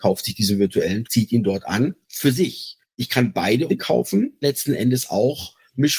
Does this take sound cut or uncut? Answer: cut